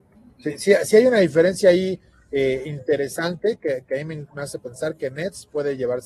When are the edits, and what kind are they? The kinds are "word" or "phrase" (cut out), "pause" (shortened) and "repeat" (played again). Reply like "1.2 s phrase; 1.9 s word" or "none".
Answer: none